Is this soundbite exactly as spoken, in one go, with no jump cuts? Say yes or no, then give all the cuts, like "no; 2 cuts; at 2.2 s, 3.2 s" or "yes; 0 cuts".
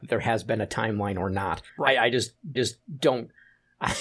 no; 2 cuts; at 1.7 s, 2.6 s